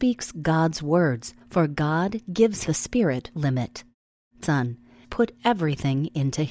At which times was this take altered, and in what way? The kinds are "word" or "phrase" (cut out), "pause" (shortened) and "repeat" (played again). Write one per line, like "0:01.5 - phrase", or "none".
0:01.4 - pause
0:02.6 - word
0:03.3 - word
0:04.4 - phrase
0:05.0 - phrase